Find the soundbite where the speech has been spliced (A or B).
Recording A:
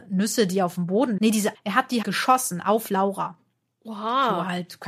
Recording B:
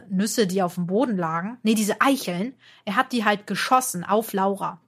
A